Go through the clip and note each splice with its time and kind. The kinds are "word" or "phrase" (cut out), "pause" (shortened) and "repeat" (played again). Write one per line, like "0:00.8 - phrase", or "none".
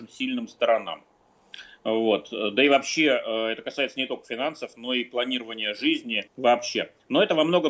0:06.3 - pause